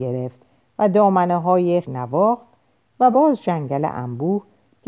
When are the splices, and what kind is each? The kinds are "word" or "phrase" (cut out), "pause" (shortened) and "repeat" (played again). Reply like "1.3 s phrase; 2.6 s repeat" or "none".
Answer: 1.8 s phrase; 3.1 s word